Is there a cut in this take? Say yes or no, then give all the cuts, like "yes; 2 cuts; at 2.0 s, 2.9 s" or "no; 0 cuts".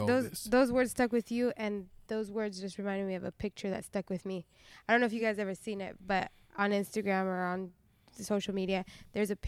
no; 0 cuts